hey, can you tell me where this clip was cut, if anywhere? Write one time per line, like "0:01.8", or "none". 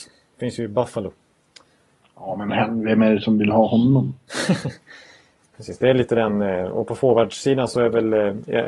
0:05.5